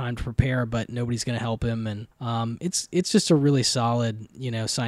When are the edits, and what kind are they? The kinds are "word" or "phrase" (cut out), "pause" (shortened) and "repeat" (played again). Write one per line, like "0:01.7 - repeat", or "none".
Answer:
0:02.1 - pause